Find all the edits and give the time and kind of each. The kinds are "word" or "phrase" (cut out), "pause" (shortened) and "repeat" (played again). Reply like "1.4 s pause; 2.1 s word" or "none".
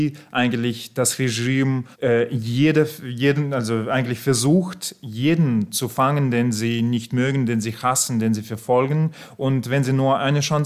1.9 s pause